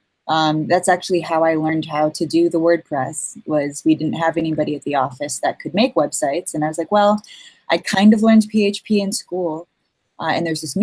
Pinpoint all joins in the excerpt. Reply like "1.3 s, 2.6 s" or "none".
none